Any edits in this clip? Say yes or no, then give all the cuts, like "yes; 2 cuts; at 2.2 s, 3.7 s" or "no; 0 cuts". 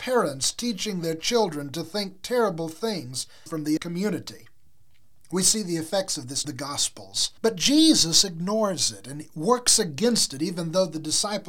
yes; 4 cuts; at 3.5 s, 3.8 s, 6.4 s, 7.4 s